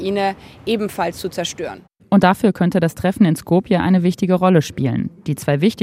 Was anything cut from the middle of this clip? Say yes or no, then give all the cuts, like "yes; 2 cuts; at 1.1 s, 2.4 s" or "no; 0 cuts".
no; 0 cuts